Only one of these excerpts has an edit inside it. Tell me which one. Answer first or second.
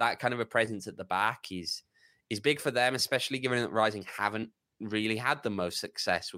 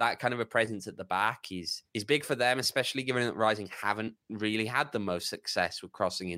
second